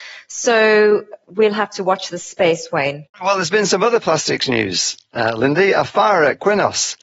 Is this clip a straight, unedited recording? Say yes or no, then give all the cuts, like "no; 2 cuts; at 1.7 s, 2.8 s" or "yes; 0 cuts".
no; 2 cuts; at 1.2 s, 3.1 s